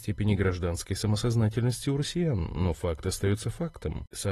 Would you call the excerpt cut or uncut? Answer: uncut